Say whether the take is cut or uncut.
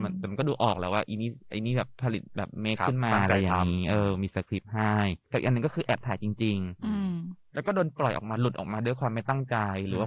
cut